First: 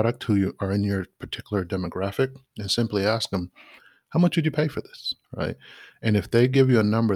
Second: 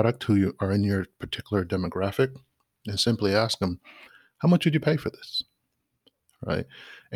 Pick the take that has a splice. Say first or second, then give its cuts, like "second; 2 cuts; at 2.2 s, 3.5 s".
first; 2 cuts; at 2.5 s, 5.2 s